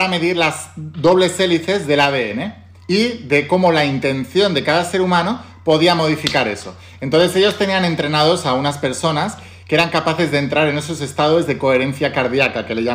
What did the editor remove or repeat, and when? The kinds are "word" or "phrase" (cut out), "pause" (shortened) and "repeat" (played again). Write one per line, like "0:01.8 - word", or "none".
none